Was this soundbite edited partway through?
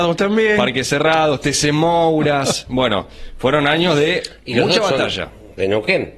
no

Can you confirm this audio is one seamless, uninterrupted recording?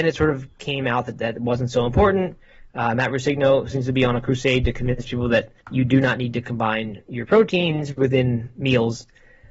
no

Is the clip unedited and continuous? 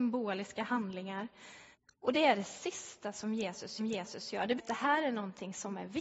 no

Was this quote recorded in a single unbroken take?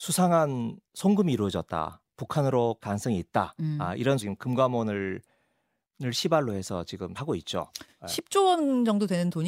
no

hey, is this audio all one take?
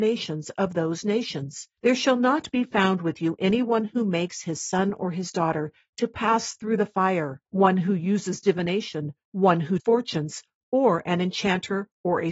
no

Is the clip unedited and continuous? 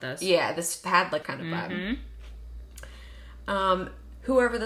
no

